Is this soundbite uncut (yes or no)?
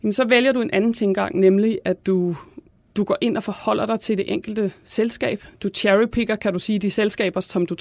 yes